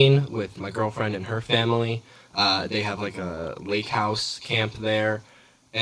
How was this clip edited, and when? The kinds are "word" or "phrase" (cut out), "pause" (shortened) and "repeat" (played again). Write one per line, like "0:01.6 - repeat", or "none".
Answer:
none